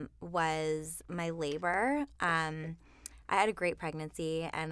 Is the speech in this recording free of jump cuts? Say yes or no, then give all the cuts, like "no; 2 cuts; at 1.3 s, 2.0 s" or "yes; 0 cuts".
yes; 0 cuts